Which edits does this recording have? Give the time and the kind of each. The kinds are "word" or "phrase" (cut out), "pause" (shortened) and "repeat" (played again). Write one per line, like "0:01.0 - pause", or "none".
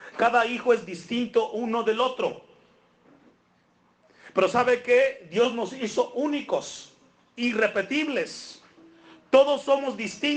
none